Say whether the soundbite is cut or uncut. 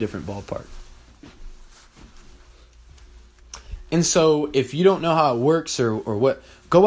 uncut